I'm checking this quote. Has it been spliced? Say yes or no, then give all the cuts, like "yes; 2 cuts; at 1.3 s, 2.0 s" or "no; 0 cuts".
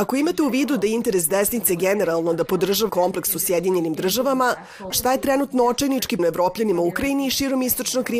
yes; 3 cuts; at 2.9 s, 4.9 s, 6.2 s